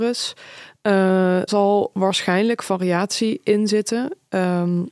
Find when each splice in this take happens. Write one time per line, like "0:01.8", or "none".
0:01.5